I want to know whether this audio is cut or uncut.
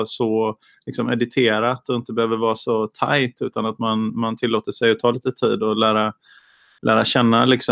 uncut